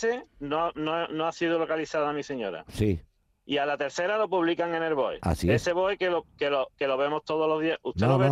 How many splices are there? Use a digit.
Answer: 0